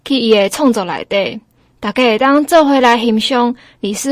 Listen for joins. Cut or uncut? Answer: uncut